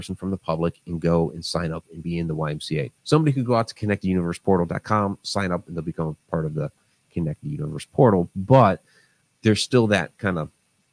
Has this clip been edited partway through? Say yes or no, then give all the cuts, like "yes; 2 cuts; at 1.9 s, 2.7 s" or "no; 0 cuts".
yes; 1 cut; at 3.0 s